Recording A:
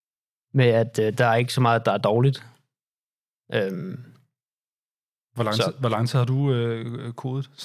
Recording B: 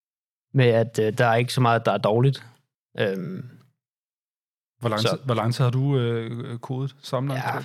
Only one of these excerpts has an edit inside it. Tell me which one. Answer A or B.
B